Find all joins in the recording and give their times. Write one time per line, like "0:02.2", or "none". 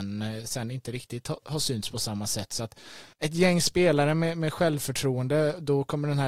0:03.1